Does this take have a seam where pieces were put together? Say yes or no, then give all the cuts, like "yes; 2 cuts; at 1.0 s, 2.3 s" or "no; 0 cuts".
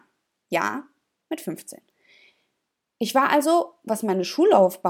no; 0 cuts